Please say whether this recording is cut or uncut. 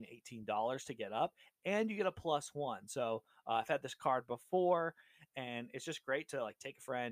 uncut